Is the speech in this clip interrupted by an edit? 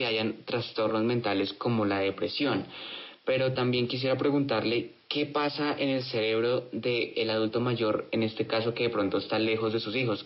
no; 0 cuts

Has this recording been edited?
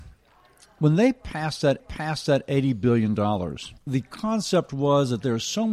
yes; 2 cuts; at 1.8 s, 3.8 s

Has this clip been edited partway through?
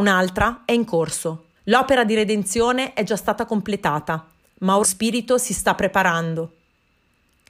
yes; 2 cuts; at 1.6 s, 4.8 s

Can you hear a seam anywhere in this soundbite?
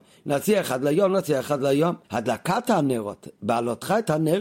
yes; 1 cut; at 2.0 s

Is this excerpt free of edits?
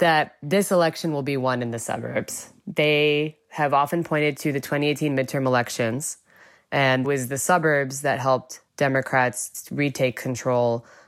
no; 3 cuts; at 2.6 s, 7.0 s, 8.7 s

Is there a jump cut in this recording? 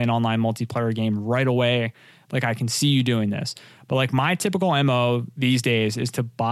no; 0 cuts

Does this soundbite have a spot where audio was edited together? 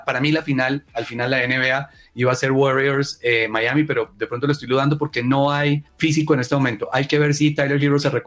yes; 1 cut; at 5.9 s

